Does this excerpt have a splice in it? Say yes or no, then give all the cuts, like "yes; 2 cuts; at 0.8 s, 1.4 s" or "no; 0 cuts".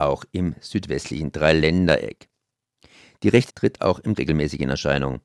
yes; 2 cuts; at 3.5 s, 4.2 s